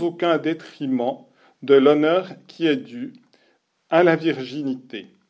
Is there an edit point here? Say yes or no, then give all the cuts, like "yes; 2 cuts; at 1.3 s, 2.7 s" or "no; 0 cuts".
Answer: no; 0 cuts